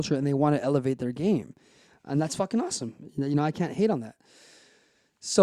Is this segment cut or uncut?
uncut